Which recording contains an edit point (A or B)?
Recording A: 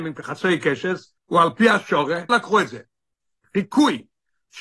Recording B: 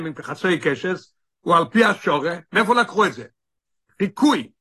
A